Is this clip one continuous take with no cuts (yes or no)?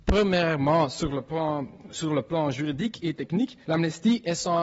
no